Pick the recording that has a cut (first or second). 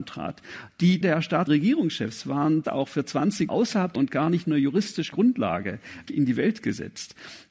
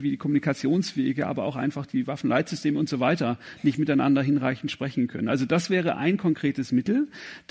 first